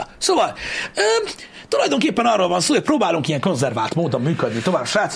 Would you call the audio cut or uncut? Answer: uncut